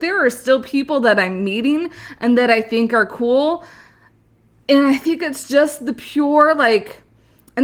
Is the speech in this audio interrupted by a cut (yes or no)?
no